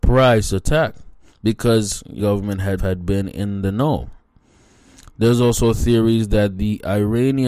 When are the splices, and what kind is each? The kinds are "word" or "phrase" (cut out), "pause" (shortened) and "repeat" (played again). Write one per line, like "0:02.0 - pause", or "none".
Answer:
0:01.3 - pause
0:02.2 - phrase
0:02.8 - phrase